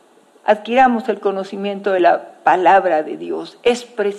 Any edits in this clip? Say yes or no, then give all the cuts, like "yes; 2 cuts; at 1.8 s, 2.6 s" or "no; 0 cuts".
no; 0 cuts